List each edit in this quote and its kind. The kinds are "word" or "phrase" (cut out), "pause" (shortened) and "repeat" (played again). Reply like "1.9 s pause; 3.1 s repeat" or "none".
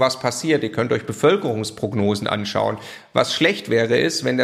none

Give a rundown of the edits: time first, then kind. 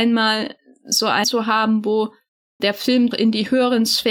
1.2 s word; 2.6 s word; 3.1 s word

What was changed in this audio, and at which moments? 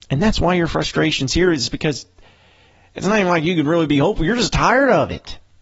none

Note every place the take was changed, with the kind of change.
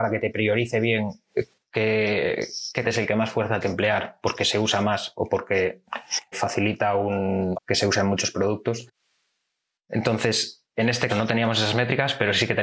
2.8 s word; 3.6 s word; 6.3 s word; 7.5 s word; 11.1 s word

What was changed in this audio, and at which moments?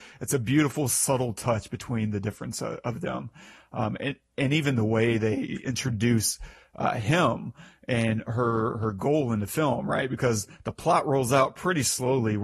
none

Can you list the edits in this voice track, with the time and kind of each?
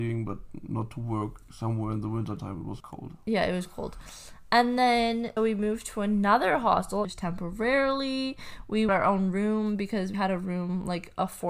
2.8 s word; 5.4 s word; 7.0 s word; 8.9 s word; 10.1 s word

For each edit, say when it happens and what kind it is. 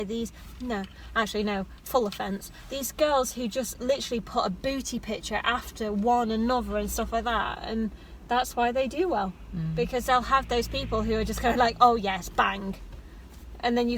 none

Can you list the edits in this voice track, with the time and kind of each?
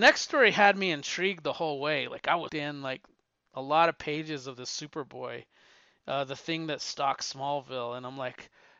2.5 s word

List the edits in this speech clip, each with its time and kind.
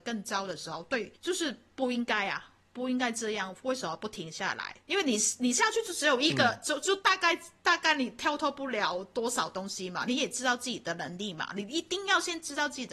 1.1 s pause; 4.8 s pause

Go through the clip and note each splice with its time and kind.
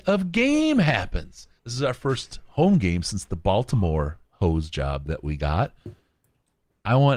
1.6 s pause; 4.2 s pause

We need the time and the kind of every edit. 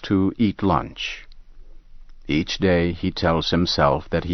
none

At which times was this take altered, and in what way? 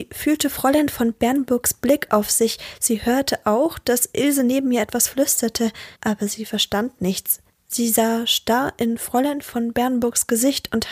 5.9 s pause; 7.5 s pause

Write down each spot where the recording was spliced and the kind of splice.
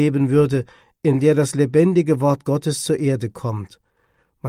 none

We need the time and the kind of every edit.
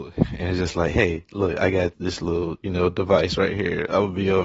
1.9 s word

